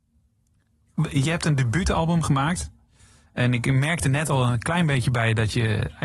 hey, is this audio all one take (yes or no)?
yes